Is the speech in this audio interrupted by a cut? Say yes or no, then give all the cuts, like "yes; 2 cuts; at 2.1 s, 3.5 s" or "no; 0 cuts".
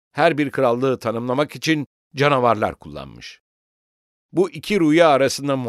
no; 0 cuts